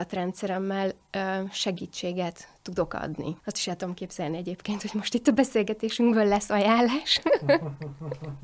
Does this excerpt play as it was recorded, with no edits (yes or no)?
no